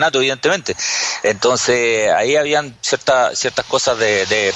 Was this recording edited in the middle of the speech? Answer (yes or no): no